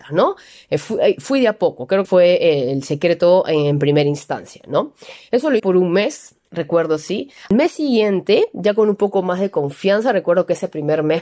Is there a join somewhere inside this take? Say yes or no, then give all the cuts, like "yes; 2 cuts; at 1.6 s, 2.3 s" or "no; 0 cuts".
yes; 3 cuts; at 2.0 s, 5.6 s, 6.4 s